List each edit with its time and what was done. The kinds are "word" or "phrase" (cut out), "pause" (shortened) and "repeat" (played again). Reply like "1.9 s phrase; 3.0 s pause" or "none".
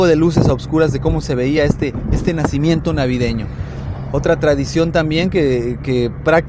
none